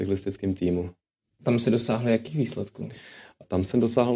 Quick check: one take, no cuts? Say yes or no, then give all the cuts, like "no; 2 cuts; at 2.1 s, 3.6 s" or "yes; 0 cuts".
yes; 0 cuts